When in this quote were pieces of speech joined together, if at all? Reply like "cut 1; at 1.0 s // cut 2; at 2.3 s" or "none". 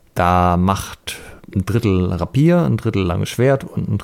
none